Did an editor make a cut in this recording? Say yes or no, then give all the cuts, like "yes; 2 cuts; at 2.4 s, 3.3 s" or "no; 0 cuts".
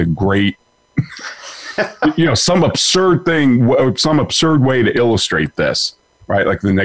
no; 0 cuts